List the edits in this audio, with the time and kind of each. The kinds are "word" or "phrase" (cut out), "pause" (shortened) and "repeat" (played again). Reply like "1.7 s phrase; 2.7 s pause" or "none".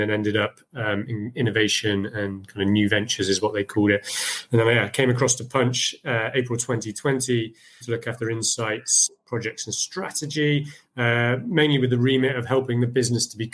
7.8 s word